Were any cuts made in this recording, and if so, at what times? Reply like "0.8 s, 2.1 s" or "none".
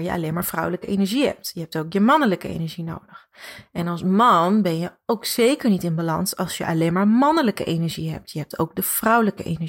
none